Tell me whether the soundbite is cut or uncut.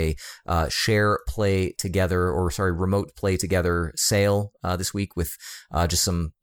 uncut